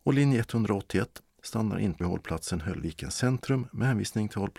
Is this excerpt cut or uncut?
cut